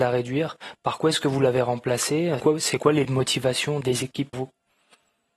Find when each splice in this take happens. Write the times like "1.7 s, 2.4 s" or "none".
2.4 s, 3.0 s, 3.8 s, 4.3 s